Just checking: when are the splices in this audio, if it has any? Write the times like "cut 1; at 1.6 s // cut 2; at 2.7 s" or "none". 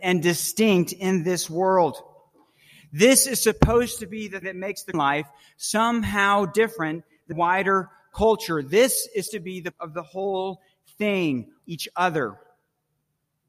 cut 1; at 4.4 s // cut 2; at 4.9 s // cut 3; at 7.3 s // cut 4; at 9.3 s // cut 5; at 9.7 s // cut 6; at 11.6 s